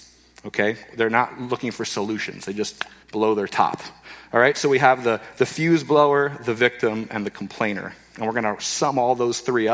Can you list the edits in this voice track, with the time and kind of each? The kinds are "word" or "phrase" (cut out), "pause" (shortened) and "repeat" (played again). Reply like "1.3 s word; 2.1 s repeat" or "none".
3.0 s pause